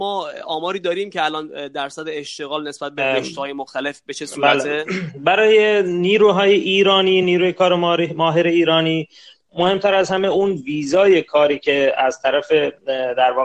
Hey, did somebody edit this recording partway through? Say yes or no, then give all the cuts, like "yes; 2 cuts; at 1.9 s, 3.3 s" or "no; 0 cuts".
no; 0 cuts